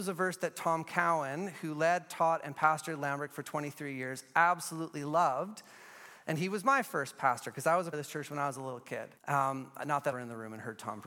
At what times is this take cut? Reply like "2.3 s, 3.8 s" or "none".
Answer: 7.9 s, 9.2 s, 10.1 s